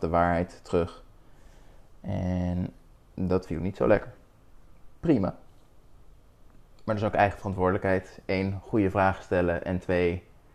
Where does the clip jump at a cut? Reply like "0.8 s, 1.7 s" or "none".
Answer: none